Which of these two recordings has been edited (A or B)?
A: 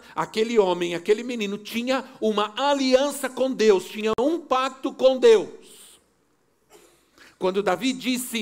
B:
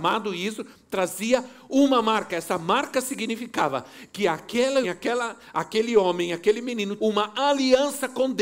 B